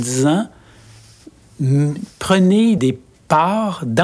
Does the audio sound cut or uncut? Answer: cut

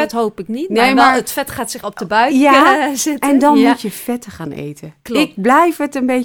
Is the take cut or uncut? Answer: cut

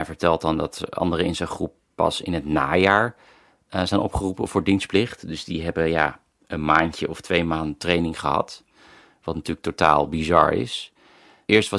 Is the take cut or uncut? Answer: uncut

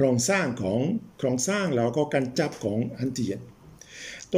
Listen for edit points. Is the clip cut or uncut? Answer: cut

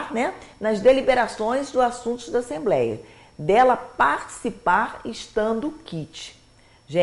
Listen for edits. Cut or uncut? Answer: uncut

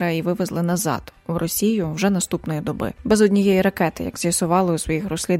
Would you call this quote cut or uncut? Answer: uncut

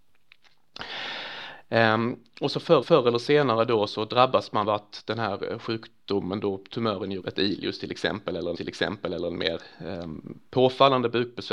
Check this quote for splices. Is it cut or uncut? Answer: cut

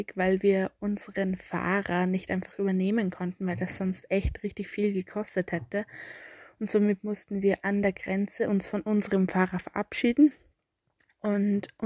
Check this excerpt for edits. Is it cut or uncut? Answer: uncut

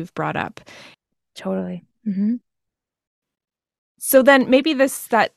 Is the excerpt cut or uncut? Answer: uncut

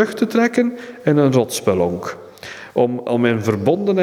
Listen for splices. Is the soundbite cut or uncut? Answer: uncut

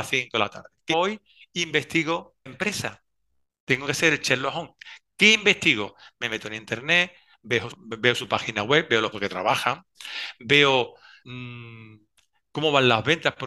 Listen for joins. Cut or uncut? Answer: cut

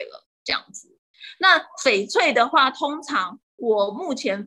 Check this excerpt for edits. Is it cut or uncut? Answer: cut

